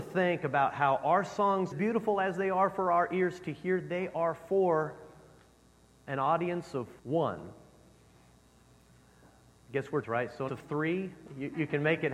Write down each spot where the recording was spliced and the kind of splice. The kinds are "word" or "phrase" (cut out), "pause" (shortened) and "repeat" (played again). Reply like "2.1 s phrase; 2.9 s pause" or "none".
1.7 s phrase; 7.0 s pause; 10.0 s word; 10.5 s word